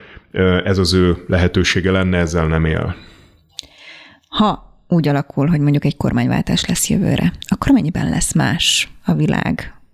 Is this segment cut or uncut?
uncut